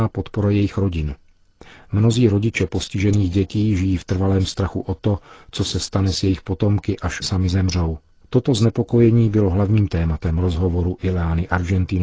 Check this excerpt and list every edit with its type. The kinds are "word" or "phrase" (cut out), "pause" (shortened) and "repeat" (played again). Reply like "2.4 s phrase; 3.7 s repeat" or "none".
7.2 s word; 8.2 s pause

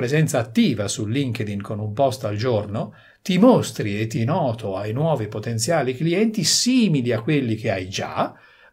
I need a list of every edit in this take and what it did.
4.2 s word

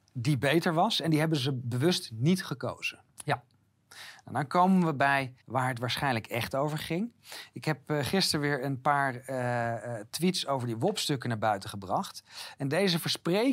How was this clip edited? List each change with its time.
5.4 s pause

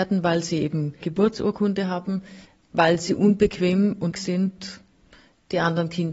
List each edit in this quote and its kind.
1.0 s word; 2.4 s pause; 4.1 s word

